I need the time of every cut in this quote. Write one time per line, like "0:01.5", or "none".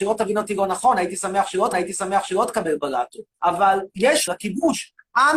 0:01.7
0:03.3
0:04.3